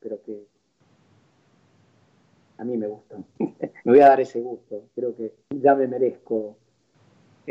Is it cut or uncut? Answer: cut